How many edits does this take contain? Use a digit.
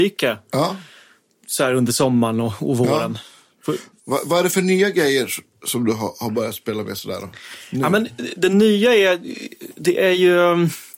0